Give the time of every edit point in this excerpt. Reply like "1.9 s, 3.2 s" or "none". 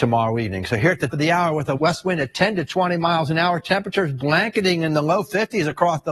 1.1 s, 1.8 s